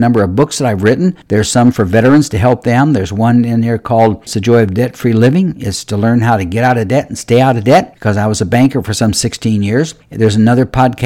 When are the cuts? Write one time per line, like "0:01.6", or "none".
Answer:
0:04.3